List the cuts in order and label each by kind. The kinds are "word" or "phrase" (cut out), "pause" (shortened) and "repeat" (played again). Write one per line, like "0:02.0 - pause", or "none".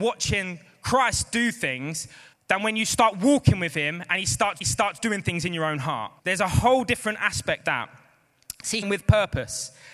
0:02.3 - pause
0:04.6 - repeat
0:06.2 - pause
0:07.6 - word
0:08.8 - phrase